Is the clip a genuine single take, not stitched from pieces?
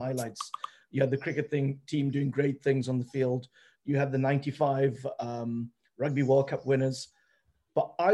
yes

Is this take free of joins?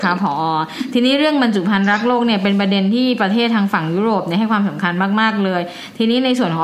yes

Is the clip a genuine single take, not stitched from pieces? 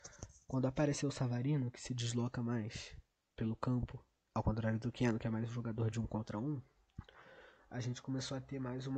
yes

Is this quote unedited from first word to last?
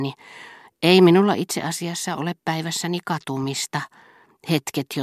yes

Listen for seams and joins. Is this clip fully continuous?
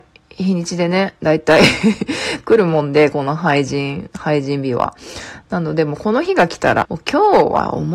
no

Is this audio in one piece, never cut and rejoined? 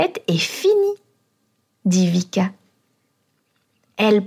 yes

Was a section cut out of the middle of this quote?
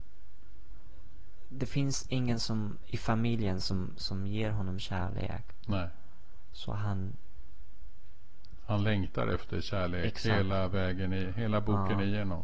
no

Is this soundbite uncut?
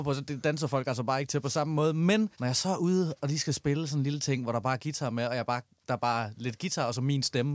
no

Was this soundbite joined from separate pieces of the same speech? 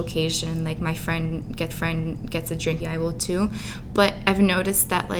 yes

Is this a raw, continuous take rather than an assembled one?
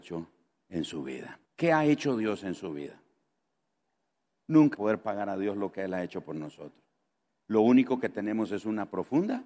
no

